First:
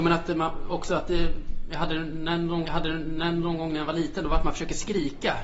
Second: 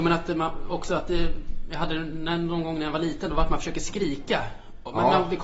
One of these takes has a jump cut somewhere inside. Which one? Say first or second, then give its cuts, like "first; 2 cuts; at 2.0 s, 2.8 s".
first; 1 cut; at 2.6 s